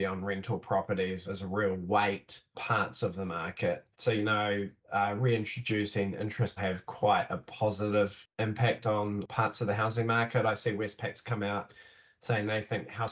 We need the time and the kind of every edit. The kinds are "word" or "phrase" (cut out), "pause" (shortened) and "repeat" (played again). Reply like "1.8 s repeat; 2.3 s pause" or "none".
1.3 s phrase; 2.5 s word; 3.9 s pause; 6.6 s phrase